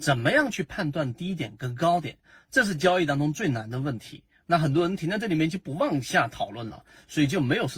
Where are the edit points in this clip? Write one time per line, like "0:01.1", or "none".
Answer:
none